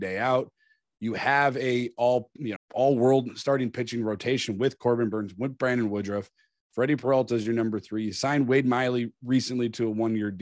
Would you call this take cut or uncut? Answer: cut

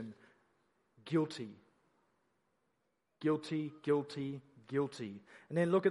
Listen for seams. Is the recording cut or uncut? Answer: uncut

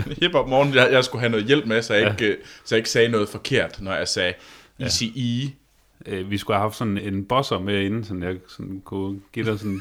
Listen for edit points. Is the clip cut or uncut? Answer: cut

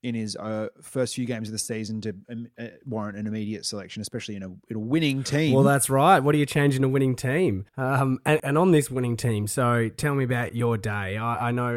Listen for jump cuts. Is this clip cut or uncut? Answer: cut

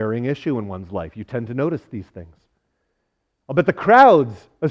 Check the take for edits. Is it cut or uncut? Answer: uncut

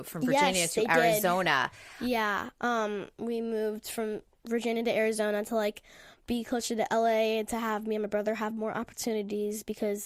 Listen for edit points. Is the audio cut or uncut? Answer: uncut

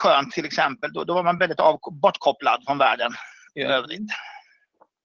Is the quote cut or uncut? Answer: uncut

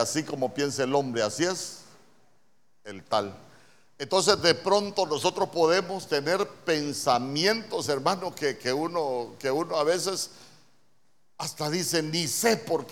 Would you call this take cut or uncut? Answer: uncut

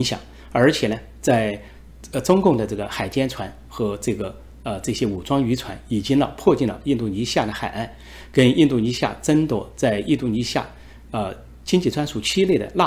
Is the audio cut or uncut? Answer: uncut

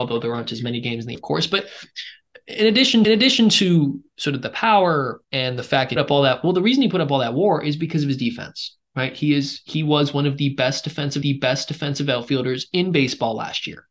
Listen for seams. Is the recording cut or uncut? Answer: cut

